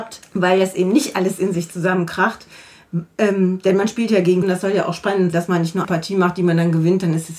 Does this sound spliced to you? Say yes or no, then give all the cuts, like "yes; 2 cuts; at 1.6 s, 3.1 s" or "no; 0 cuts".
yes; 3 cuts; at 4.4 s, 5.3 s, 5.8 s